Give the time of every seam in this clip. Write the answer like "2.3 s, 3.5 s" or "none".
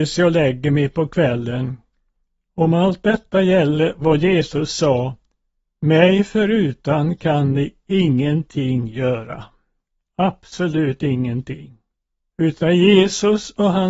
none